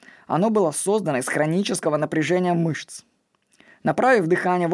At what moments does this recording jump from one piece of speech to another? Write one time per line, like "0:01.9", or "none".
none